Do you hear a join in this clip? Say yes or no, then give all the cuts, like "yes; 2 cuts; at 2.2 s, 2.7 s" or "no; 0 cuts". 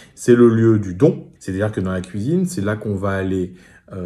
yes; 1 cut; at 1.4 s